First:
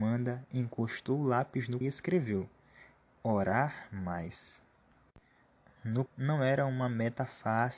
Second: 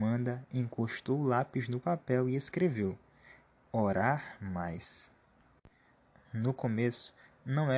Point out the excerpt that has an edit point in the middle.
first; 2 cuts; at 1.8 s, 6.1 s

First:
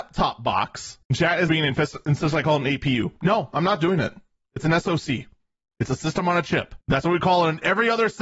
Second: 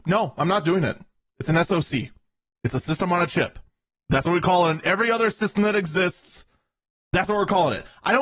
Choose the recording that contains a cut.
first; 3 cuts; at 1.0 s, 1.5 s, 6.8 s

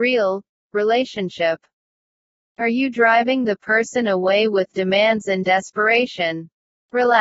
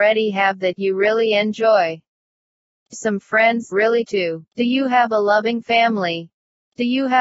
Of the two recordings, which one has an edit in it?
second; 4 cuts; at 2.9 s, 3.7 s, 4.0 s, 4.5 s

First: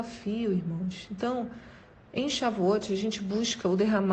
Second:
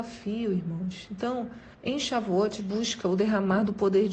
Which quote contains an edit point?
second; 2 cuts; at 1.7 s, 2.6 s

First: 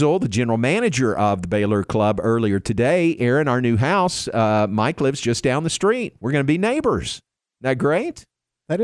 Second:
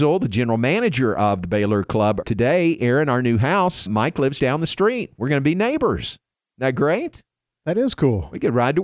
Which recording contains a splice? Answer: second; 3 cuts; at 2.2 s, 3.9 s, 4.4 s

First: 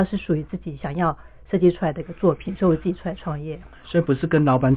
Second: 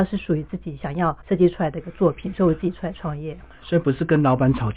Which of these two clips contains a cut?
second; 1 cut; at 1.2 s

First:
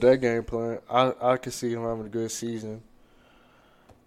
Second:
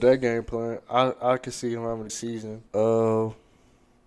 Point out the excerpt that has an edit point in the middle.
second; 2 cuts; at 2.1 s, 2.7 s

